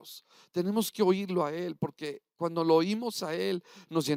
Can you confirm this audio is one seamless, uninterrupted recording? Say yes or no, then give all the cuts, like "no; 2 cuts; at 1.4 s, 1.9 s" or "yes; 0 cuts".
yes; 0 cuts